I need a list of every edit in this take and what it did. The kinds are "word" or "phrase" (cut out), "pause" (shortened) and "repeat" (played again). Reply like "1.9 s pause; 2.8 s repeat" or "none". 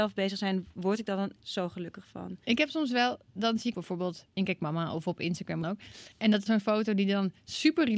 1.4 s word; 2.4 s pause; 3.7 s phrase; 4.3 s pause; 5.6 s phrase; 6.1 s pause; 6.5 s word